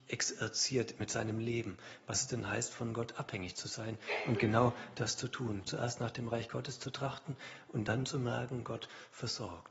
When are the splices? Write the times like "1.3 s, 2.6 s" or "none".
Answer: none